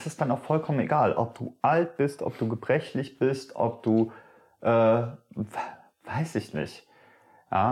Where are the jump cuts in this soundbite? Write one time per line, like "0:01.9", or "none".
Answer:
none